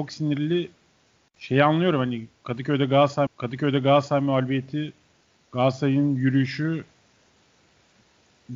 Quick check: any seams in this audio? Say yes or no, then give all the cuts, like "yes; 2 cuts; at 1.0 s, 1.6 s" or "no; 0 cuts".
yes; 1 cut; at 3.3 s